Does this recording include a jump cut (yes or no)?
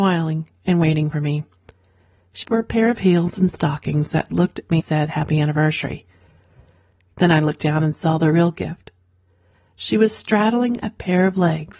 yes